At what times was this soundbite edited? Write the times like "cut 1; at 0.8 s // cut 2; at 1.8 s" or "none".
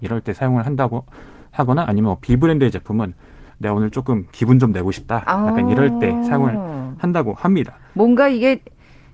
cut 1; at 3.5 s